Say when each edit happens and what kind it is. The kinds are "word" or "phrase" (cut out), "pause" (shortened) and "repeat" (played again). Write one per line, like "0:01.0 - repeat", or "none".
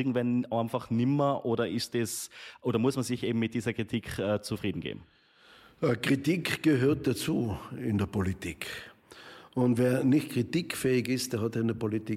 none